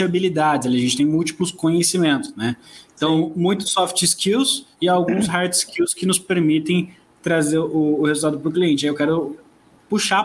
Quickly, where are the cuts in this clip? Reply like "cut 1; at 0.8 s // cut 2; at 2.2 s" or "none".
cut 1; at 4.7 s